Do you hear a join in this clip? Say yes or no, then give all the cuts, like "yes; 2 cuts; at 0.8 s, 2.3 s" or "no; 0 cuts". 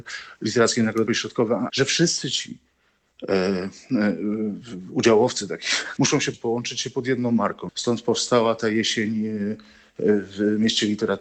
yes; 6 cuts; at 1.1 s, 1.7 s, 4.6 s, 6.0 s, 6.3 s, 7.7 s